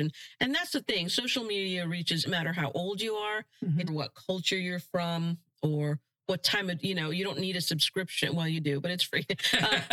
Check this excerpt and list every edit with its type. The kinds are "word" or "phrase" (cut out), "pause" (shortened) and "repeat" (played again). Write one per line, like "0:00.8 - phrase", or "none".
0:02.2 - phrase
0:03.9 - phrase